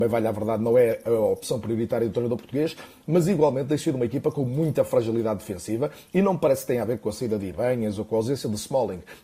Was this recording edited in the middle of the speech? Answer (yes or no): no